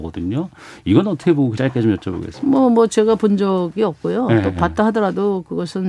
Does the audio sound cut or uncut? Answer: cut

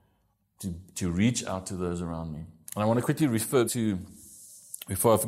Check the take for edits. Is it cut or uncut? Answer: cut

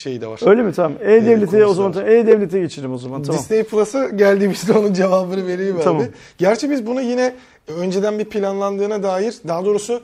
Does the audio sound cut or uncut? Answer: uncut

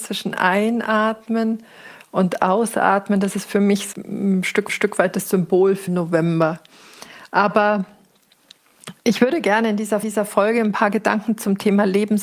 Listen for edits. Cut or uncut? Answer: cut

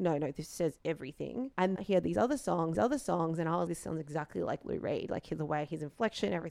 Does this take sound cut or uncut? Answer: cut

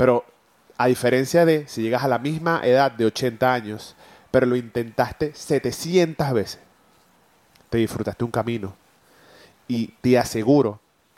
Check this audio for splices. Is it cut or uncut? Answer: uncut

